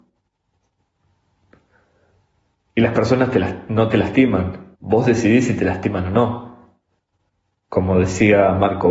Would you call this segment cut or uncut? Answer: cut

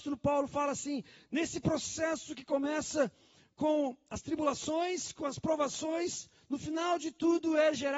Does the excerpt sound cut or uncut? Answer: uncut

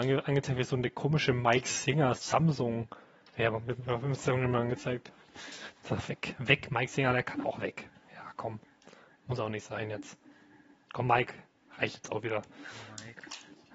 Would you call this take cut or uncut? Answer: uncut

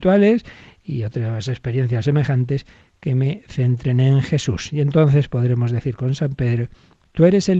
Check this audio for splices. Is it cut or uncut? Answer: uncut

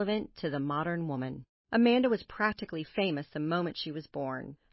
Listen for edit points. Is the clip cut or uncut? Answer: uncut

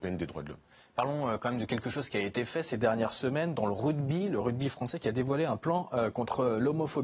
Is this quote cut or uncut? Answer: uncut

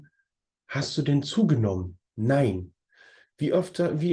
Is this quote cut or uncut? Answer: cut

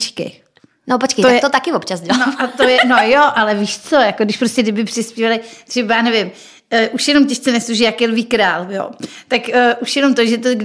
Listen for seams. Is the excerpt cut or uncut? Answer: uncut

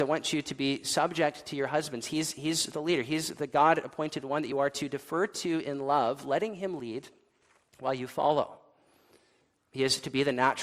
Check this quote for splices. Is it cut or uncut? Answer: uncut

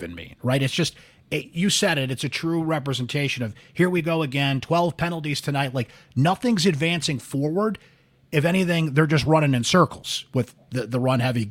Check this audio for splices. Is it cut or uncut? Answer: uncut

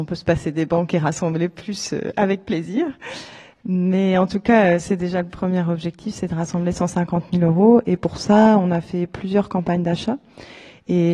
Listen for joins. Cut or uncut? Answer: uncut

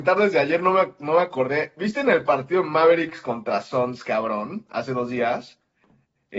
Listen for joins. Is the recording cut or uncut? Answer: uncut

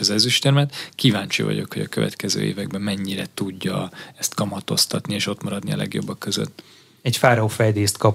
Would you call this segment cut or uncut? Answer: uncut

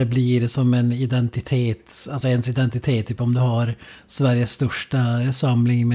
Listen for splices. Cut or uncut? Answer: uncut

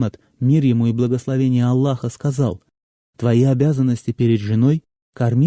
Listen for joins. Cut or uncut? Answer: uncut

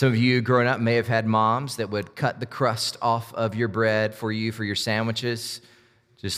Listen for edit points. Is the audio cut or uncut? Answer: uncut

